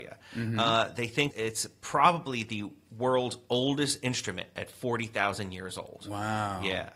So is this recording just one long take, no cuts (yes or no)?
no